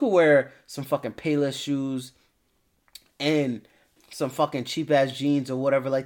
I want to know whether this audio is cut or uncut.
cut